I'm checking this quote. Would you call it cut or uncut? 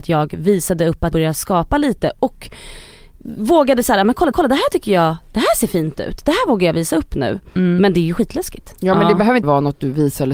cut